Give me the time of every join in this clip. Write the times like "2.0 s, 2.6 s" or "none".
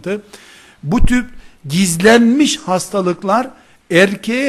1.6 s

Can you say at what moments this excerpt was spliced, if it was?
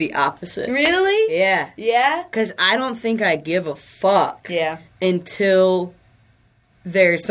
none

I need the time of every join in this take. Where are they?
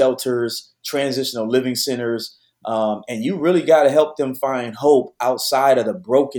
none

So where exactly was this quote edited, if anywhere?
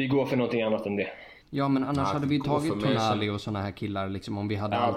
1.4 s

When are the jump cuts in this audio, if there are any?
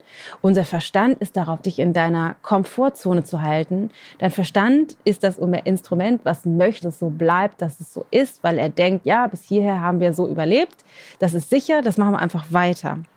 1.6 s, 6.8 s

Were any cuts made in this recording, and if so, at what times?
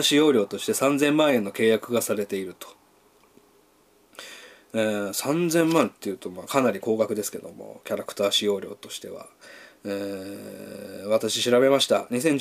none

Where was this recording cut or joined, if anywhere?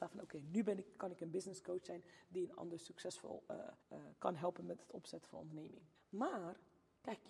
3.8 s, 5.9 s

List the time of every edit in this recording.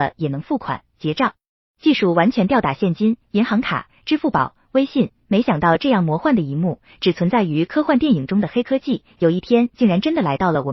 none

